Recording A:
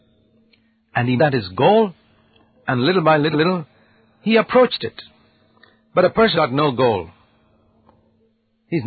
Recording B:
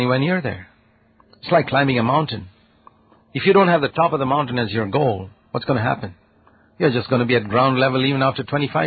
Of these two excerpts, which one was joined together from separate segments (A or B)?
A